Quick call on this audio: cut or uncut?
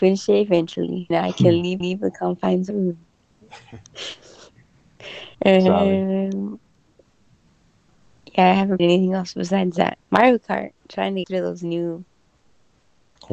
cut